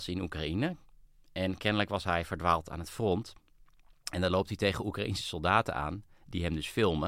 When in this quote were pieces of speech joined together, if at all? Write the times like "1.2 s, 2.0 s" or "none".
none